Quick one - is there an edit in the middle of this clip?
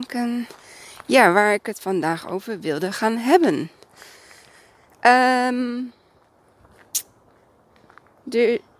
no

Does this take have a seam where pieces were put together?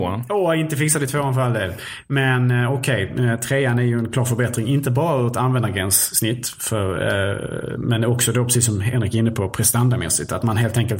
no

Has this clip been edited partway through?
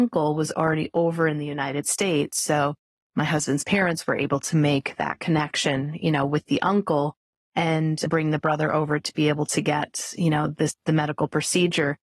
no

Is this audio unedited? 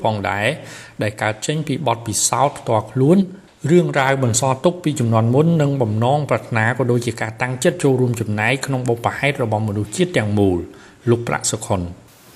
yes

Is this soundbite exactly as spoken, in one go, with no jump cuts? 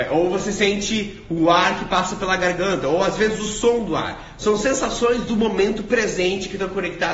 yes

